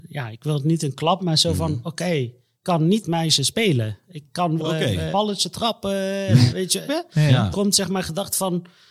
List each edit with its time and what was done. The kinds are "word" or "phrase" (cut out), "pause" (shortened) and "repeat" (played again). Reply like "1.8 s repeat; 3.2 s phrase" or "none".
1.2 s word; 2.5 s word; 3.0 s word; 4.6 s word; 5.1 s word; 6.5 s word; 6.9 s word; 7.5 s word